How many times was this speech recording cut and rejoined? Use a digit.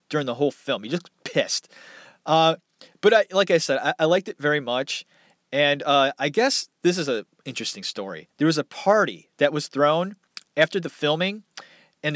1